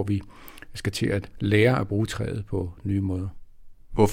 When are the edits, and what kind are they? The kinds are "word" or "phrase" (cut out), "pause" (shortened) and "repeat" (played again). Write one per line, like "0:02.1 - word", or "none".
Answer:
none